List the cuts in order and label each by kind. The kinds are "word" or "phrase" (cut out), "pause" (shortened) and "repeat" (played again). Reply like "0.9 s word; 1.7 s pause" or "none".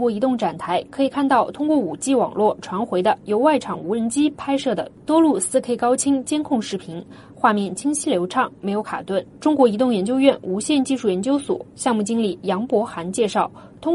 9.3 s pause